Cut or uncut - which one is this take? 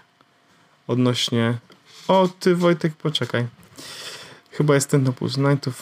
uncut